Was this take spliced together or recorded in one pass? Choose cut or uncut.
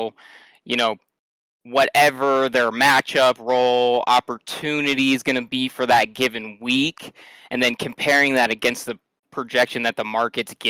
uncut